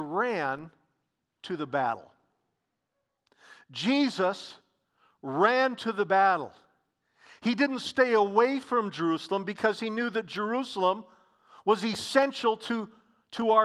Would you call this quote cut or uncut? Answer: uncut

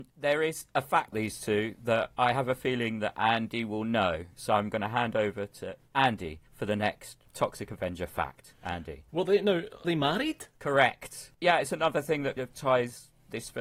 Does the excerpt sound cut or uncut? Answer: cut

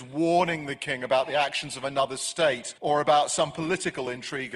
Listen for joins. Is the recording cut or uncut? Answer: cut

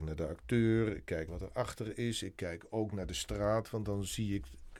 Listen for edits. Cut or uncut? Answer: cut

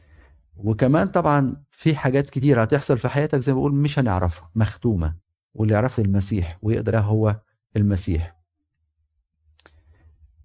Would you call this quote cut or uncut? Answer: cut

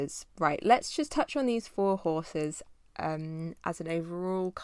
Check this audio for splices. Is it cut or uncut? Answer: uncut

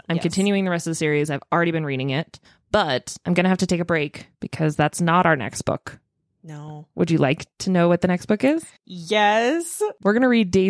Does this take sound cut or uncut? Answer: cut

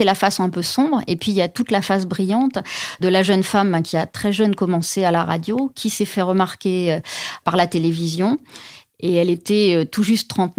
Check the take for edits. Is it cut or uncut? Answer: uncut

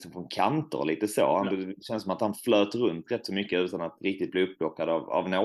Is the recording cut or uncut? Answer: uncut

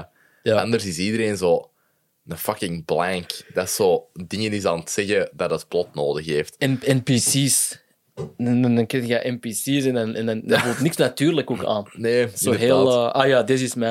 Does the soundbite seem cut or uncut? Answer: uncut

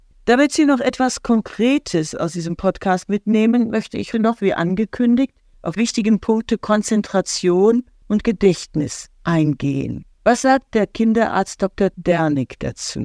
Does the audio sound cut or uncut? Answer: cut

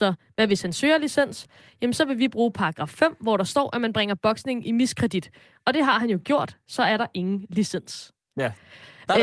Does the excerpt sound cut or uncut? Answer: uncut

